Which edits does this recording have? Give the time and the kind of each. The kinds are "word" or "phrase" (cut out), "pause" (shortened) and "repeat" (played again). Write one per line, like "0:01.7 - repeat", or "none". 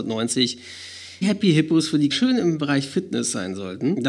0:01.2 - word
0:02.1 - word